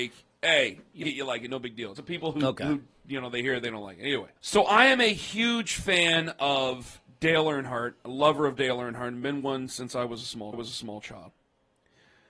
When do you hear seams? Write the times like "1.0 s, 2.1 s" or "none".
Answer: 1.0 s, 2.0 s, 4.4 s, 10.5 s

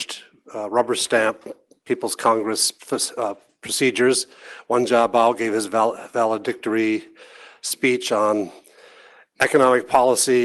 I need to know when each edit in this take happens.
none

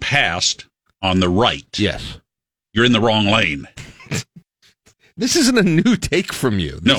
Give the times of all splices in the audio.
none

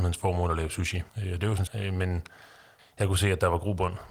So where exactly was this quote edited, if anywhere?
1.1 s, 1.7 s

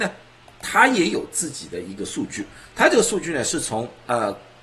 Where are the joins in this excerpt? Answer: none

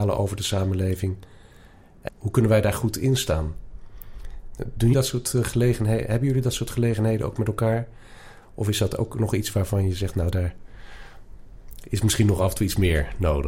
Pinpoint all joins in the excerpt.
2.1 s, 4.9 s

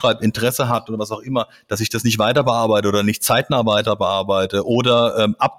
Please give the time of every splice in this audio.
none

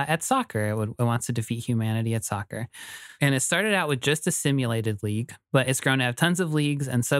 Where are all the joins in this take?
none

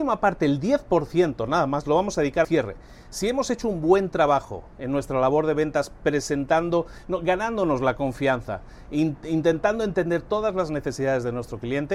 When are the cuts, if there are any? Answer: 2.4 s

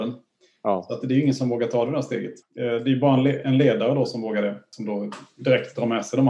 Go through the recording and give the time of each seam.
2.4 s

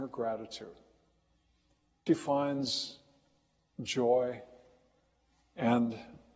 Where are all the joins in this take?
2.1 s

